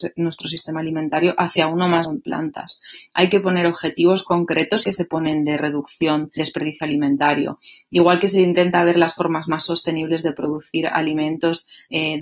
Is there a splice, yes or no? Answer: yes